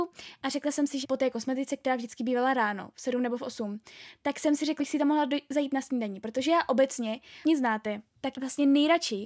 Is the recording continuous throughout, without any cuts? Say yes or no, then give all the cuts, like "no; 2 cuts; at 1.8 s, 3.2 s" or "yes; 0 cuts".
no; 4 cuts; at 1.0 s, 4.8 s, 7.4 s, 8.3 s